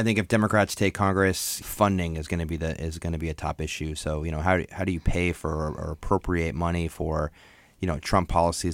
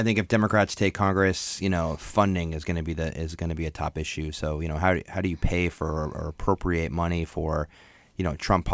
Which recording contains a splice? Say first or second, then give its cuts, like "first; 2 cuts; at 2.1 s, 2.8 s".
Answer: first; 1 cut; at 1.6 s